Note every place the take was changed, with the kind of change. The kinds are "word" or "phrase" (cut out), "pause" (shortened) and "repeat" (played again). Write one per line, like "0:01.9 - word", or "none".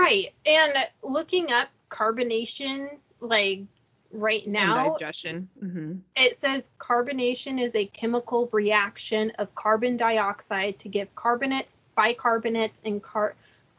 none